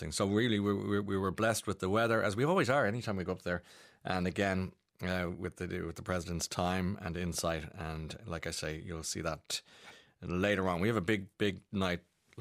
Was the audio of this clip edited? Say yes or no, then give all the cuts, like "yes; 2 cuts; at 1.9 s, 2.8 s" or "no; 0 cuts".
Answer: no; 0 cuts